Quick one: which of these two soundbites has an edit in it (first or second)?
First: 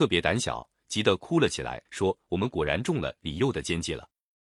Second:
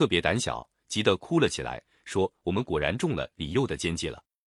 first